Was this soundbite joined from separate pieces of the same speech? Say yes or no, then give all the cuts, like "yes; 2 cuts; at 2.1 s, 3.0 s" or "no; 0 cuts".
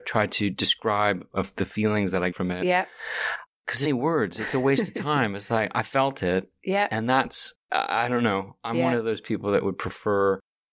yes; 3 cuts; at 2.3 s, 3.8 s, 7.6 s